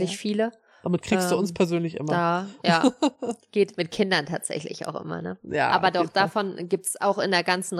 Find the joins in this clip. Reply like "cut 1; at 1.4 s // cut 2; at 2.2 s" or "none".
none